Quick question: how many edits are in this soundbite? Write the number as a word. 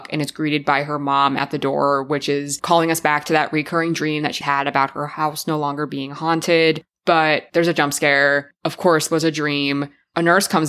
two